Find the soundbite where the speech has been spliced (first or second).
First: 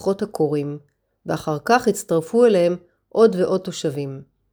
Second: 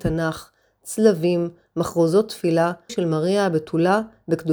second